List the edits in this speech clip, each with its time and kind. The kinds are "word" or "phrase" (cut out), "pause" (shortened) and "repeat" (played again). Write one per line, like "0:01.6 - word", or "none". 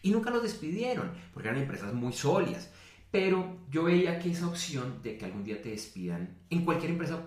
none